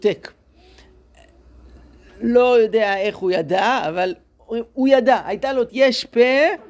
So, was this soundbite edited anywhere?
yes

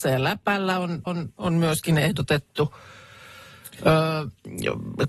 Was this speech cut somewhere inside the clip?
yes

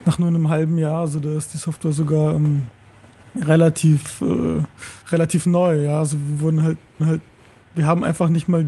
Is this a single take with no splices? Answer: no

